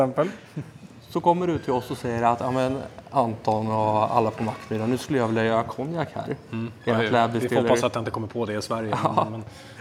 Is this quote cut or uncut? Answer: uncut